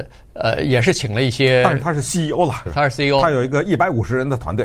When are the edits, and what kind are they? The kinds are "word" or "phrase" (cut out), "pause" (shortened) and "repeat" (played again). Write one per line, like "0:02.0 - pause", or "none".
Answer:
0:02.7 - word